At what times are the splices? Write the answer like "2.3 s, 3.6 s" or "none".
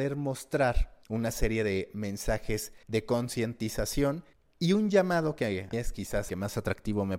1.0 s, 2.8 s, 4.3 s, 5.7 s, 6.3 s